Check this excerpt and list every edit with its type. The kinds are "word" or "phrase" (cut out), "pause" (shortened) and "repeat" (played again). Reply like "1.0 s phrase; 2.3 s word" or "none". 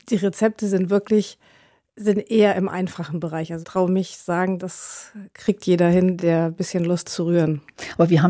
3.6 s word; 4.6 s word; 6.2 s word; 7.0 s word